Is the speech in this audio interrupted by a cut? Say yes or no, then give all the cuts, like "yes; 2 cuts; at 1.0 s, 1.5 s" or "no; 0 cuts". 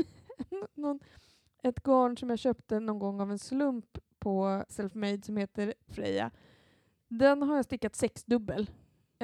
yes; 2 cuts; at 4.7 s, 5.9 s